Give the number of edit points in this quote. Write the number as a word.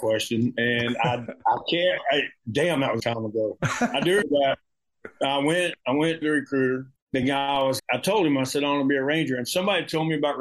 six